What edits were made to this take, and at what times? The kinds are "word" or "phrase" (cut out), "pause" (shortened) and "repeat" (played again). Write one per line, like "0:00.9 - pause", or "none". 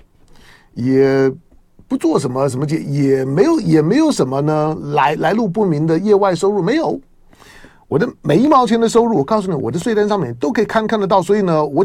none